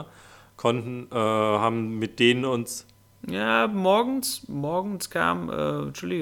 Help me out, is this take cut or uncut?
uncut